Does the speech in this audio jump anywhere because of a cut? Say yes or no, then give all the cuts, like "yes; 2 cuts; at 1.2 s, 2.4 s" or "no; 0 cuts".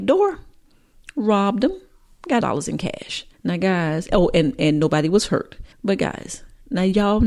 yes; 3 cuts; at 2.4 s, 3.3 s, 5.7 s